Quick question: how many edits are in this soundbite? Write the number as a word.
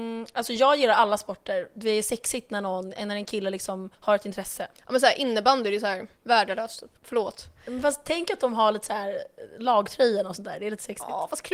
three